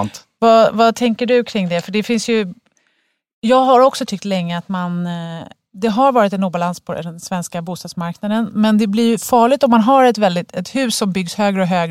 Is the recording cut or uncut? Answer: uncut